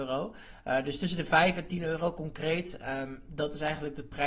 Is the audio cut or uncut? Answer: uncut